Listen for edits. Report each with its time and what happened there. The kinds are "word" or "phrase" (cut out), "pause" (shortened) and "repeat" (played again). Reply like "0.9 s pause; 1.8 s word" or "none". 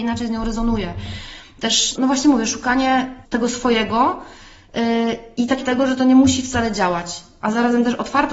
2.0 s word; 3.2 s word; 5.6 s word